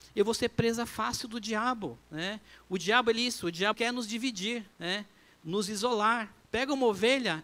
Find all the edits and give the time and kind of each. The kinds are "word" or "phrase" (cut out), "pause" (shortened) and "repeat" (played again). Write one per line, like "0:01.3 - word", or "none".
0:02.0 - pause
0:03.2 - word
0:03.7 - word
0:04.7 - pause
0:06.4 - pause